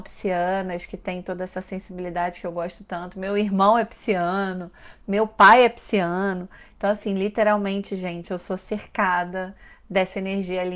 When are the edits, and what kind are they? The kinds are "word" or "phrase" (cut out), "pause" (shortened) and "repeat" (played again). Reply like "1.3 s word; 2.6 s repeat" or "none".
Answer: none